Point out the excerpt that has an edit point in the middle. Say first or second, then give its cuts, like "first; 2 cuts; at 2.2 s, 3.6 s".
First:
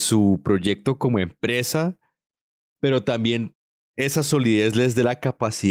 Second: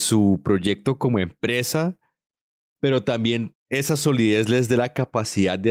second; 1 cut; at 3.6 s